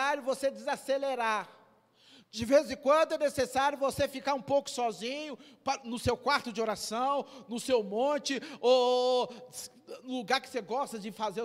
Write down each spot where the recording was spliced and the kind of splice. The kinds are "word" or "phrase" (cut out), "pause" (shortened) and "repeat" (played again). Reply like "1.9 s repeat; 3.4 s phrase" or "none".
none